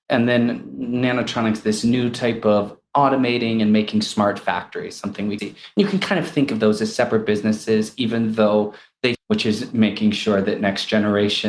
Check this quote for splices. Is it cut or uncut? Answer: cut